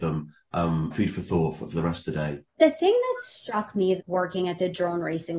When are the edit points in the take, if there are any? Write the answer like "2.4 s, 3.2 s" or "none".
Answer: 0.9 s, 1.7 s, 2.5 s, 4.0 s